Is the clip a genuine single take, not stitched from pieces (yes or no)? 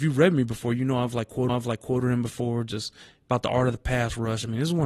no